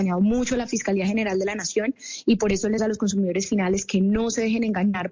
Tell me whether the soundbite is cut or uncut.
cut